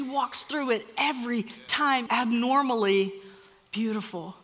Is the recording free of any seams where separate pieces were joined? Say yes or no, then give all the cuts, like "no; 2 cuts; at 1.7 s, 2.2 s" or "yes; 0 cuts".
no; 1 cut; at 2.1 s